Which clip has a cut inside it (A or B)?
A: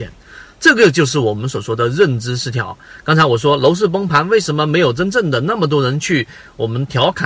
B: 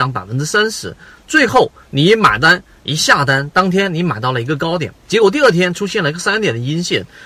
B